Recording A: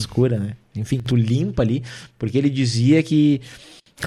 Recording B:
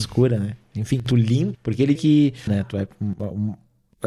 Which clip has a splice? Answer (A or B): B